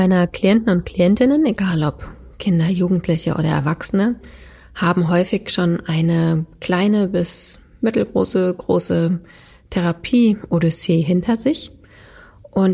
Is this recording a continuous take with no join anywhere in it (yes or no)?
yes